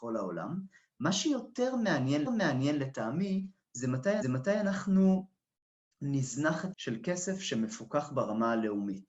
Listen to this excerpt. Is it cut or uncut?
cut